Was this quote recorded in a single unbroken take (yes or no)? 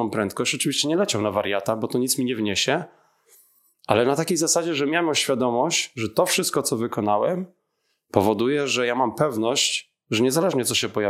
yes